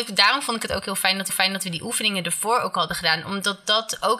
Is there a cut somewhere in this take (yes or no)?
yes